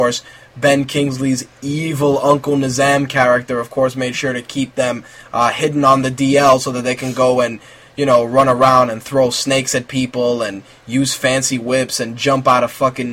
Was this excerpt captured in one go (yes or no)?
yes